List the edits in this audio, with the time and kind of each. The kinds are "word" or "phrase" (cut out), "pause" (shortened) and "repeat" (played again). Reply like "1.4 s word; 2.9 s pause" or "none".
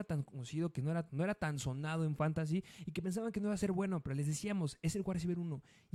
1.1 s word